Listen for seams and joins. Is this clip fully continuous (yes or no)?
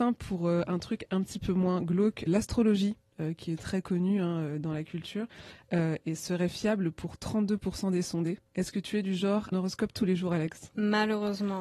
no